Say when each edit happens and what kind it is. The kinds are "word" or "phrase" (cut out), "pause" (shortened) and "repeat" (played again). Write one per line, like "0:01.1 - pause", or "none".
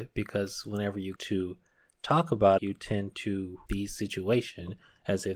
0:01.2 - word
0:02.6 - word
0:03.7 - word